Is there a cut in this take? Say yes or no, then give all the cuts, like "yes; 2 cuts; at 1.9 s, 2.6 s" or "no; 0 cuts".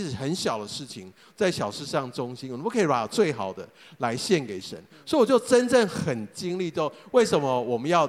no; 0 cuts